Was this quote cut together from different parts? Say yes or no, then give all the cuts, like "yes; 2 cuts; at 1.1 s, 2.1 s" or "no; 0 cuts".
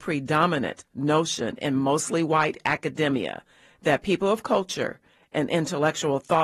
no; 0 cuts